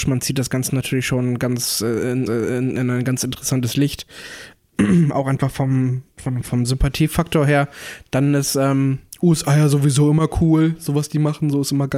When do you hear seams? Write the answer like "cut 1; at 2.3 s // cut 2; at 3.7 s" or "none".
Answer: cut 1; at 2.3 s